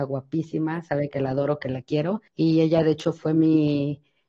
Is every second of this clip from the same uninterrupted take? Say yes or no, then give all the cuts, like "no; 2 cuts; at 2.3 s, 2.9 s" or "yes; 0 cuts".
no; 1 cut; at 2.3 s